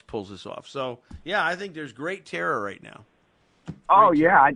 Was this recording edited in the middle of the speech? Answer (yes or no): no